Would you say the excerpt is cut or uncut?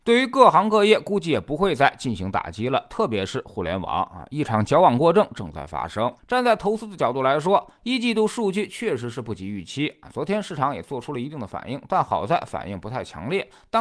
cut